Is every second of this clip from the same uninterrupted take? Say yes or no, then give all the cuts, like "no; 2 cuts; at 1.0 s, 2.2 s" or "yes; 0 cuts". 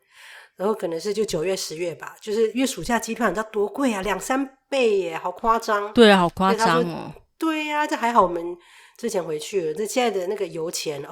yes; 0 cuts